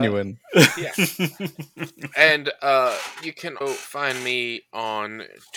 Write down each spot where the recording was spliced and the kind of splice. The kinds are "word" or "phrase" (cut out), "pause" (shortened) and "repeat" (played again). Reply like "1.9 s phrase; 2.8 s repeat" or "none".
3.6 s word

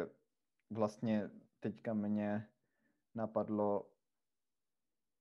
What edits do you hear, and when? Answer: none

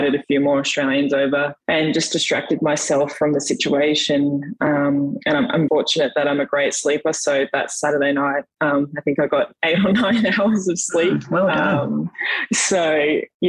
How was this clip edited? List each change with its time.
1.6 s pause; 5.7 s word

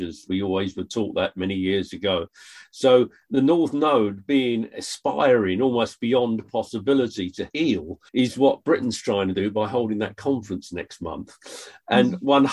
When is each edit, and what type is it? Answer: 8.1 s pause

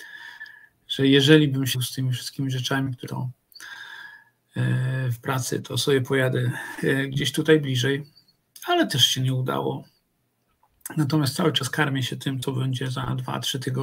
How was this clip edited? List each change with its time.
1.7 s word; 3.1 s word

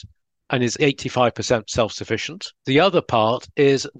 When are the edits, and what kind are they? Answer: 2.6 s pause

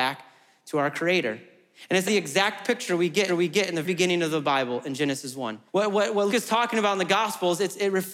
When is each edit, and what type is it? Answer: 2.1 s word; 3.3 s repeat; 3.8 s word; 5.7 s pause; 6.3 s word

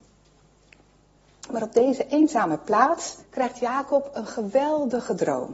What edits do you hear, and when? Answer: 3.2 s pause

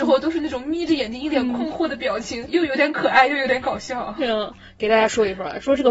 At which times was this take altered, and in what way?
2.5 s word

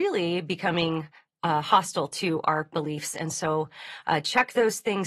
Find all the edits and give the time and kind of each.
none

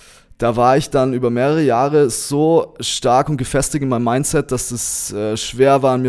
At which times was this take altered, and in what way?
none

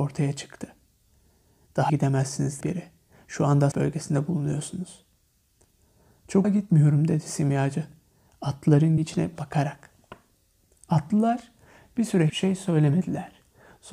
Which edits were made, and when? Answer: 1.9 s word; 2.6 s word; 3.7 s word; 6.4 s word; 9.0 s word; 12.3 s word

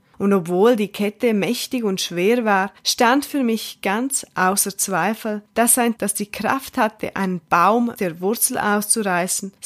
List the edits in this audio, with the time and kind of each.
6.0 s word; 7.9 s word

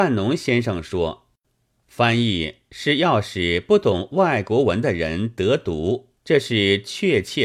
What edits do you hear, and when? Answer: 1.4 s pause; 6.2 s pause

